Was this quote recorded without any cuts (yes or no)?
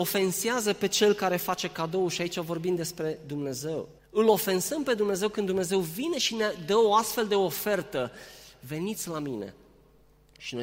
no